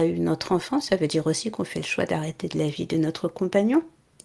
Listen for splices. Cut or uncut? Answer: uncut